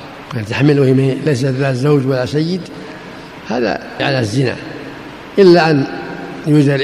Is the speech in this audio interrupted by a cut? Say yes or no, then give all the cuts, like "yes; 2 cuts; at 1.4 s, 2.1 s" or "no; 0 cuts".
yes; 1 cut; at 4.0 s